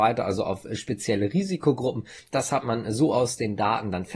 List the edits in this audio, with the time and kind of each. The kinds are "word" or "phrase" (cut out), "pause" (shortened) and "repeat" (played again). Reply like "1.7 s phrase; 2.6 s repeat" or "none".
none